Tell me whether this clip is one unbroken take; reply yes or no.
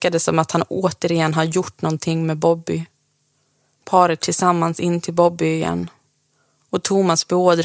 no